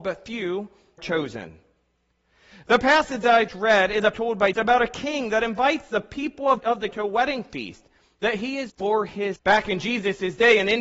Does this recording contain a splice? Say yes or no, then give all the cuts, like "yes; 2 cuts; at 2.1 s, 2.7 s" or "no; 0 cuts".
yes; 8 cuts; at 1.0 s, 3.5 s, 4.1 s, 4.5 s, 6.6 s, 6.9 s, 8.7 s, 9.4 s